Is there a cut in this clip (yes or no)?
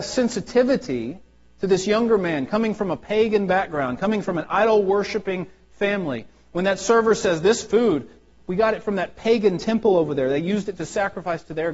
no